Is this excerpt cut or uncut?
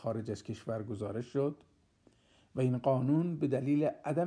uncut